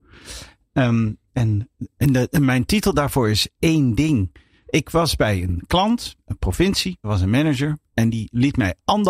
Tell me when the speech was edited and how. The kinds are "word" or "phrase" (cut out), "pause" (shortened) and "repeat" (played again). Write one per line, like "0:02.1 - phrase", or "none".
0:01.3 - pause
0:06.2 - pause
0:07.0 - word